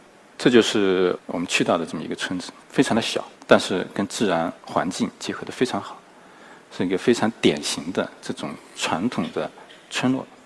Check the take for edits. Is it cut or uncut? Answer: cut